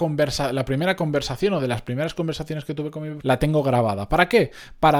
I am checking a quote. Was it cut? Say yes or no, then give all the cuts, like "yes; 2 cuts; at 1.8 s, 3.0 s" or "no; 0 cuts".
yes; 1 cut; at 3.2 s